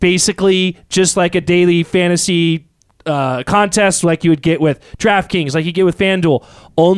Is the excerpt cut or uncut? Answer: uncut